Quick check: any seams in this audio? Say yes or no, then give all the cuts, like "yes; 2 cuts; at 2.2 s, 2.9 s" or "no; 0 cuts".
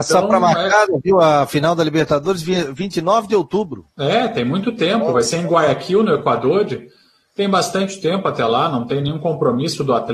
yes; 1 cut; at 3.9 s